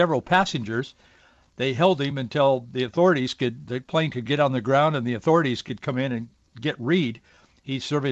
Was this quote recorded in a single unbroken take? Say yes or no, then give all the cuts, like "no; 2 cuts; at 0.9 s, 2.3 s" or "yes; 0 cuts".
yes; 0 cuts